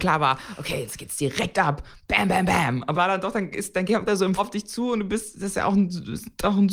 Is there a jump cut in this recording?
yes; 3 cuts; at 2.9 s, 4.1 s, 4.4 s

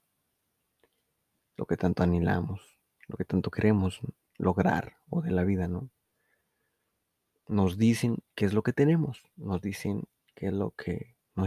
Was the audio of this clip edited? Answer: no; 0 cuts

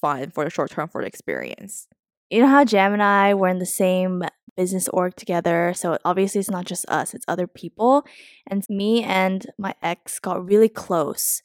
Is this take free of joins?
no; 1 cut; at 8.6 s

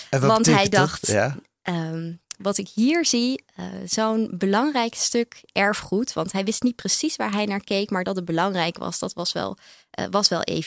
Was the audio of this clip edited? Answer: no; 0 cuts

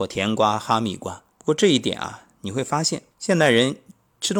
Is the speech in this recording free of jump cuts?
no; 2 cuts; at 1.3 s, 3.1 s

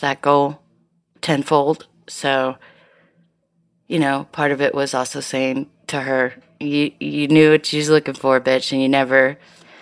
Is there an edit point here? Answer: no; 0 cuts

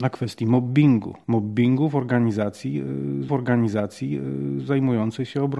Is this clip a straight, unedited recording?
no; 1 cut; at 3.3 s

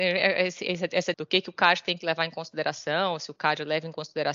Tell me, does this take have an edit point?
yes; 1 cut; at 1.1 s

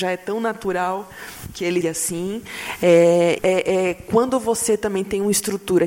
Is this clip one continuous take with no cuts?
no; 2 cuts; at 1.8 s, 3.4 s

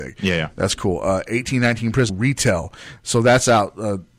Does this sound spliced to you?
yes; 1 cut; at 2.1 s

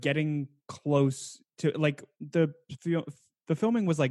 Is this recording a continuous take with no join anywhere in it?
yes; 0 cuts

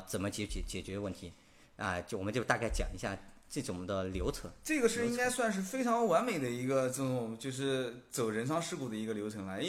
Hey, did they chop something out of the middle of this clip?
no; 0 cuts

